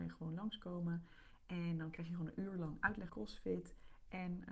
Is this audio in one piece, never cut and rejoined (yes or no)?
no